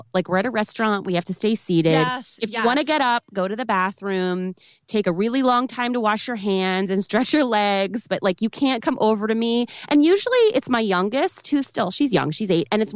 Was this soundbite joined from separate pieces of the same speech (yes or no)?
yes